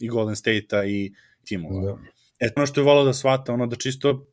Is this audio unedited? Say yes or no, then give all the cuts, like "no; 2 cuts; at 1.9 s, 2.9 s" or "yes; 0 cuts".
no; 2 cuts; at 1.4 s, 2.6 s